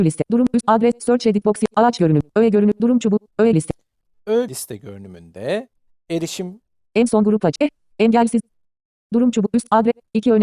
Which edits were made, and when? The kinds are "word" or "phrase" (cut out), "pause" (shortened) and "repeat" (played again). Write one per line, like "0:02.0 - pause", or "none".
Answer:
0:03.5 - word
0:04.5 - word